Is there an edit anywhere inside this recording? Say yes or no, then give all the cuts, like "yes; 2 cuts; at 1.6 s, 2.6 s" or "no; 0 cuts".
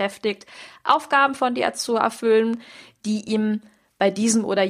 no; 0 cuts